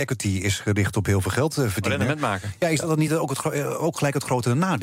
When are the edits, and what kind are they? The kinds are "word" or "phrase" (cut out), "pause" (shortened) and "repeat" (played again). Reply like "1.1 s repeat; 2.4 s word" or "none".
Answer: none

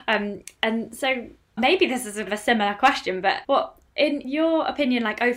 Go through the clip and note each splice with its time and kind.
1.6 s word; 2.3 s word; 3.4 s word; 4.2 s word

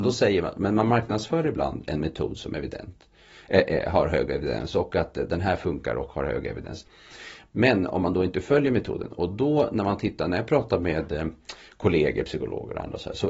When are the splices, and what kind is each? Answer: none

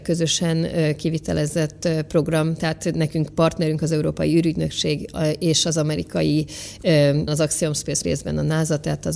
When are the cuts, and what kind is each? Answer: 7.3 s word; 8.0 s word

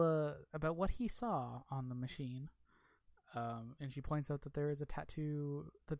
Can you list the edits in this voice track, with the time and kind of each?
none

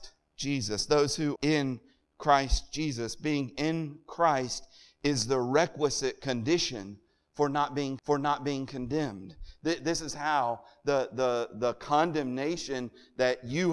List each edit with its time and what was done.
1.4 s word; 8.0 s repeat

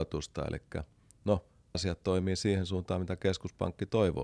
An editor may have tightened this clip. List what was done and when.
1.7 s word

